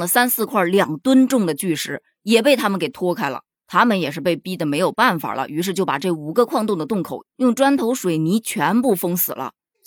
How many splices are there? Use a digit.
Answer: 0